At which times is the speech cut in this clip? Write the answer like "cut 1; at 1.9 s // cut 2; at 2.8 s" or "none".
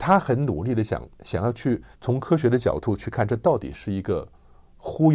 cut 1; at 1.1 s // cut 2; at 1.9 s